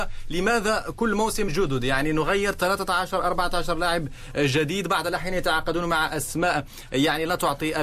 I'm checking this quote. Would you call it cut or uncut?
cut